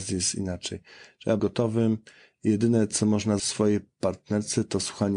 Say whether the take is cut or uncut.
cut